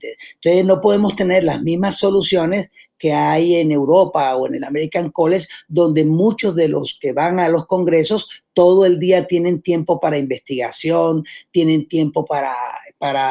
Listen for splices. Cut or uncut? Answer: uncut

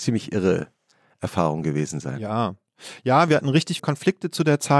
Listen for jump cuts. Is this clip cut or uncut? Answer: cut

